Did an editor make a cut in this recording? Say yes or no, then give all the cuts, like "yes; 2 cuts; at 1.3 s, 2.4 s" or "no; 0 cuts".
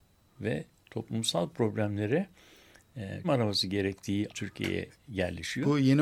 yes; 2 cuts; at 3.2 s, 4.3 s